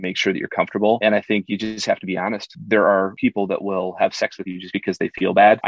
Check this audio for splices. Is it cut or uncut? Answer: uncut